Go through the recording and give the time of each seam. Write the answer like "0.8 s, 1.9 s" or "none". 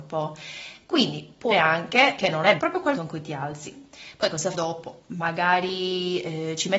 1.5 s, 2.2 s, 2.6 s, 2.9 s, 4.5 s

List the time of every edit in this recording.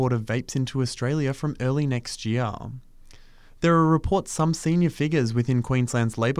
none

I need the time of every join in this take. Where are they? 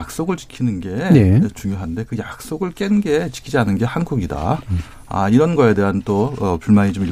none

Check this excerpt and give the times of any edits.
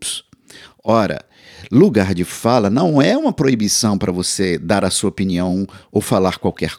none

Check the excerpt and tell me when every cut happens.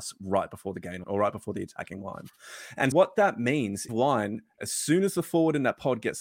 1.0 s, 2.9 s, 3.9 s

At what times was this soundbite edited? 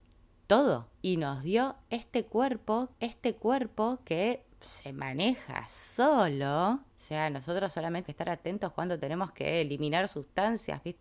0.9 s, 2.9 s, 6.9 s, 8.0 s

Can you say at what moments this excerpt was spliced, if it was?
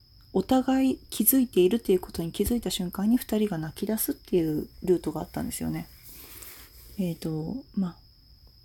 4.7 s

